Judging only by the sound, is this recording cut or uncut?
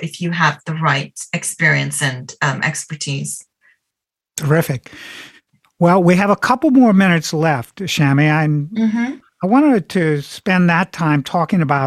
uncut